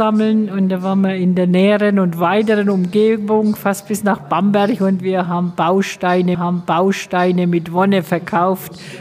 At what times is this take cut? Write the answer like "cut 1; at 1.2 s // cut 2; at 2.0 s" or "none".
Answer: cut 1; at 6.3 s